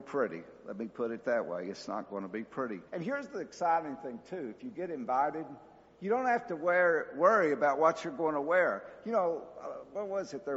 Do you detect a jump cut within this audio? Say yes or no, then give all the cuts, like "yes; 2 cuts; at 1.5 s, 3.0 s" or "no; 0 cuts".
yes; 1 cut; at 2.9 s